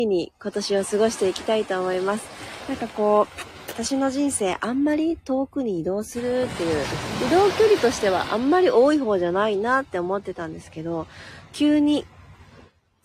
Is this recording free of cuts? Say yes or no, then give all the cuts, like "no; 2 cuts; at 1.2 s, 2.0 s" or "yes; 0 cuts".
yes; 0 cuts